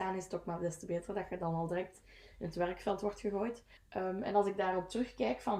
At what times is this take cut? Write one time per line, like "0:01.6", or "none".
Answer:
none